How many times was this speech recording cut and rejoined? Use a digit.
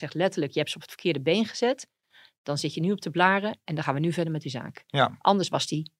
0